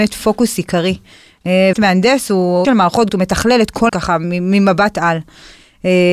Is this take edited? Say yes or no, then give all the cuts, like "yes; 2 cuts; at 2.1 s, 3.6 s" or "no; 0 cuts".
yes; 4 cuts; at 1.7 s, 2.6 s, 3.1 s, 3.9 s